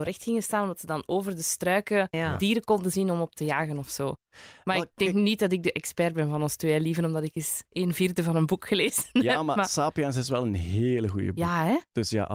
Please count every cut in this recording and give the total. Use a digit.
2